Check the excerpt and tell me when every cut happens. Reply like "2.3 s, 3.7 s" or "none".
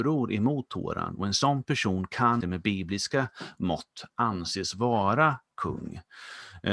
2.4 s